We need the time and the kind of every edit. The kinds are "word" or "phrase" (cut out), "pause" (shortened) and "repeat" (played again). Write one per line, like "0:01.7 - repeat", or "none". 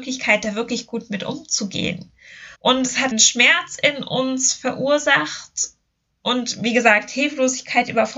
0:02.5 - pause
0:03.1 - word